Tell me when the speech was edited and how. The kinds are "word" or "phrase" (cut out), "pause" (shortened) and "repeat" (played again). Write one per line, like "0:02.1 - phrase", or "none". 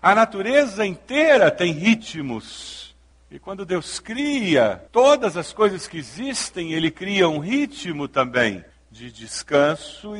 0:03.1 - pause
0:04.9 - pause
0:08.7 - pause